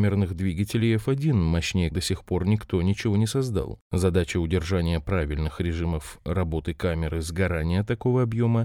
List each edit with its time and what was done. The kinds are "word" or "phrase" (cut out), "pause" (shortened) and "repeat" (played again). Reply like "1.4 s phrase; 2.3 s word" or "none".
1.9 s word